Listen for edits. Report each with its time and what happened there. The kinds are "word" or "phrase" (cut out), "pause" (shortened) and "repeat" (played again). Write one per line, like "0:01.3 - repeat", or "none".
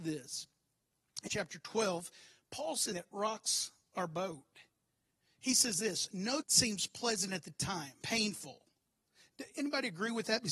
0:01.3 - word
0:02.9 - word
0:06.4 - word
0:08.0 - word